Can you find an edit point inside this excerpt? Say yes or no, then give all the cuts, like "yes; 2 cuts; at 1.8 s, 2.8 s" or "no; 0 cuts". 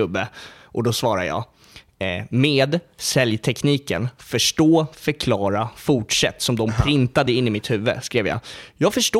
no; 0 cuts